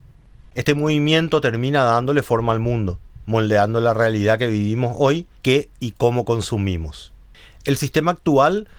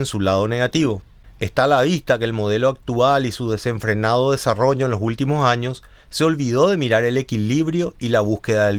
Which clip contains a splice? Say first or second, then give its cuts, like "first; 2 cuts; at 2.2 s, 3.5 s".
first; 1 cut; at 5.4 s